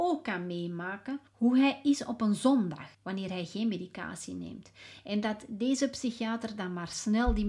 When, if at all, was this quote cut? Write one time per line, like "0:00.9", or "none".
0:01.3
0:02.9